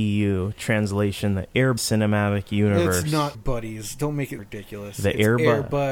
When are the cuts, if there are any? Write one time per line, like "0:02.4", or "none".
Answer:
0:01.8
0:03.3
0:04.4

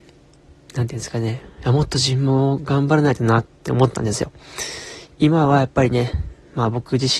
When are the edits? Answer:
0:03.5

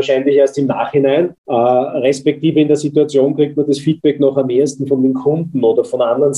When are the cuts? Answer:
0:01.4

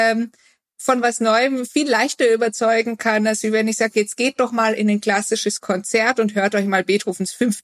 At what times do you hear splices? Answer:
none

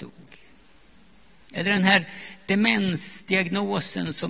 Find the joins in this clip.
none

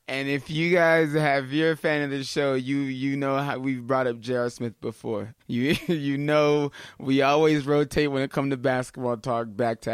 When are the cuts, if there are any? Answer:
0:05.4

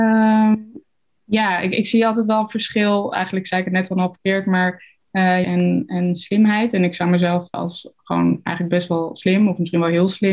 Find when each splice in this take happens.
0:05.4
0:07.5

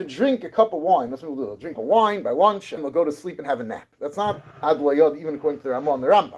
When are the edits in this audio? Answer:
0:01.7
0:02.8
0:04.5

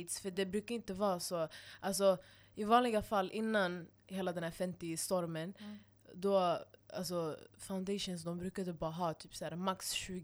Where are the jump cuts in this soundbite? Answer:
0:07.5

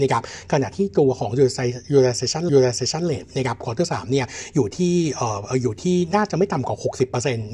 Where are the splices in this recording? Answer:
0:02.5

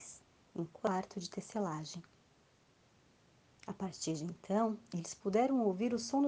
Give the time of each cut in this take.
none

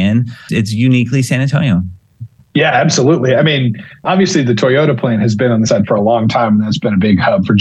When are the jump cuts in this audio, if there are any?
0:05.7

